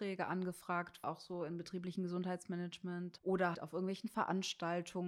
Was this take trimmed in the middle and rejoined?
yes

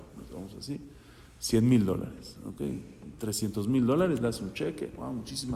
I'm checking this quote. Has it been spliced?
no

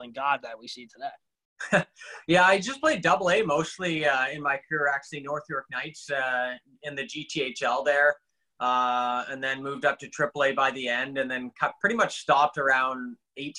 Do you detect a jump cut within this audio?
no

